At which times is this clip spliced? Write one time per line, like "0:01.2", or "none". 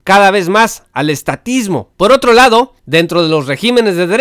0:02.8